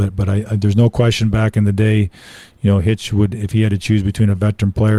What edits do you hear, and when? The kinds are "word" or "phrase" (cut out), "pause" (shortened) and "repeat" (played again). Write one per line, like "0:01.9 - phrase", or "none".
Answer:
none

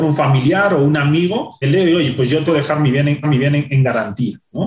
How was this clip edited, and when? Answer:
0:01.6 - word
0:02.5 - word
0:03.2 - repeat

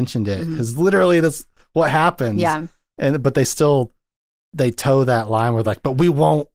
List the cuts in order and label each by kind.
none

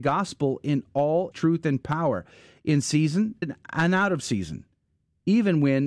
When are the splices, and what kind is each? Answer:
0:01.3 - word
0:03.4 - word

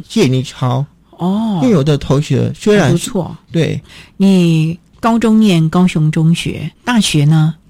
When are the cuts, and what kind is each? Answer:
0:06.8 - word

